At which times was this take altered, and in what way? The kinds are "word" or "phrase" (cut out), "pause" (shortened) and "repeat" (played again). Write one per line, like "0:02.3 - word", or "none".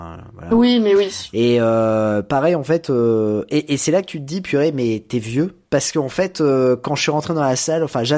0:05.7 - pause

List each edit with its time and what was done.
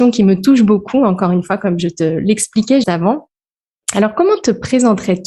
0:02.8 - word

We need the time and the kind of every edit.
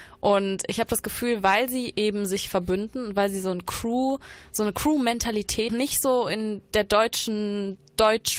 0:05.7 - phrase

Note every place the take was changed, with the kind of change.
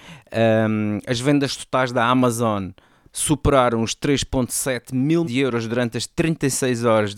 0:05.2 - word

